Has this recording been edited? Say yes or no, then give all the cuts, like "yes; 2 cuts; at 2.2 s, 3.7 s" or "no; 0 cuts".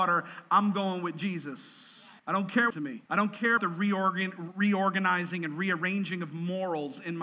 yes; 4 cuts; at 2.2 s, 2.7 s, 3.1 s, 3.6 s